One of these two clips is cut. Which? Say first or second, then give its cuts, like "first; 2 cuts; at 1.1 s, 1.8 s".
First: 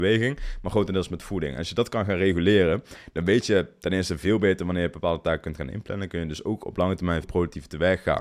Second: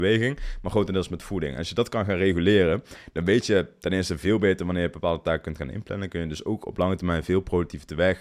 first; 1 cut; at 7.2 s